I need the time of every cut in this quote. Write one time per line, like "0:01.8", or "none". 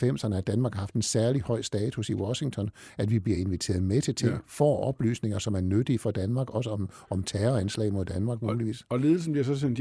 none